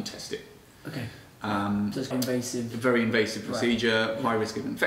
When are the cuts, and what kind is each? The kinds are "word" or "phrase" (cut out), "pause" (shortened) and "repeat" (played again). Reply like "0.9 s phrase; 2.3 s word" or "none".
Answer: 2.1 s word

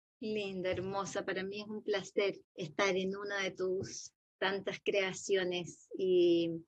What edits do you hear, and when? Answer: 2.4 s pause

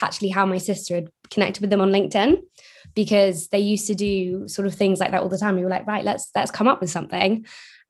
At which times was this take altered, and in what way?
none

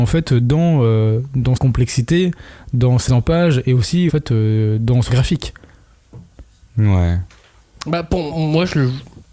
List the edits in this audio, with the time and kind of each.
1.6 s word; 3.1 s word; 4.1 s word; 5.1 s word; 8.3 s word

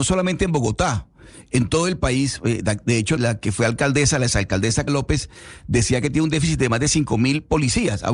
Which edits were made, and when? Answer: 3.2 s word; 4.9 s word

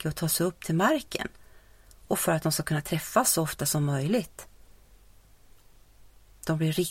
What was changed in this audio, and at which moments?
none

